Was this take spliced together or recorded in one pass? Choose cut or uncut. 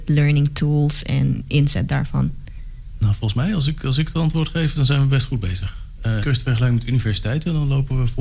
cut